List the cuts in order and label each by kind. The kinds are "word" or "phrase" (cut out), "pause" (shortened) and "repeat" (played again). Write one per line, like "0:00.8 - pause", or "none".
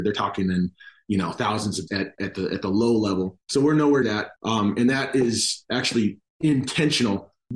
0:01.9 - word
0:02.2 - word
0:03.4 - pause
0:04.0 - word
0:04.4 - pause
0:06.3 - pause